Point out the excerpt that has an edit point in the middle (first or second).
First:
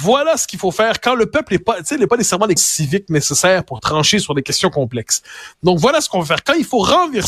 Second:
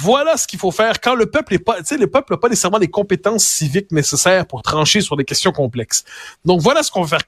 first